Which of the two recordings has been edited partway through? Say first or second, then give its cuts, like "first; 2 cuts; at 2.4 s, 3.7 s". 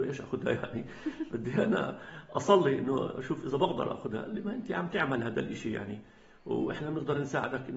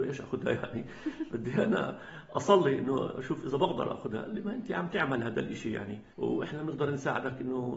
second; 1 cut; at 6.1 s